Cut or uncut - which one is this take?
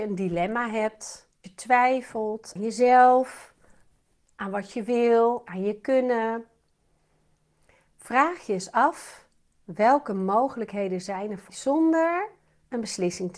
cut